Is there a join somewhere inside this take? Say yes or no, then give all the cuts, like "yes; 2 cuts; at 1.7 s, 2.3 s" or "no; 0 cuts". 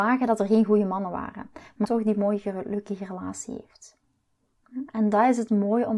yes; 1 cut; at 1.8 s